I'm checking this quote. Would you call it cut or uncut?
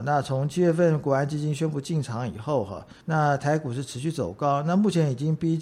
cut